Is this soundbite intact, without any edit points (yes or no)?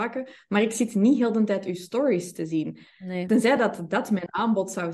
yes